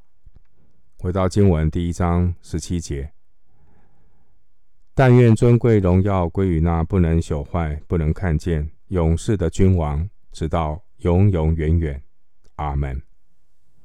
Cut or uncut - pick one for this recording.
cut